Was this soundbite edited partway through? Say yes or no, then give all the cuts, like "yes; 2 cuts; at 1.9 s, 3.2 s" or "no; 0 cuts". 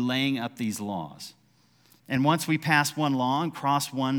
no; 0 cuts